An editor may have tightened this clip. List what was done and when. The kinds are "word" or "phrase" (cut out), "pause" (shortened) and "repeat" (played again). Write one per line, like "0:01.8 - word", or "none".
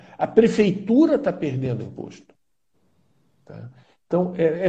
none